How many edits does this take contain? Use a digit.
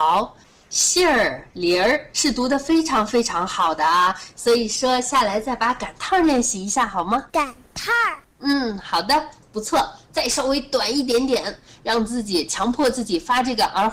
3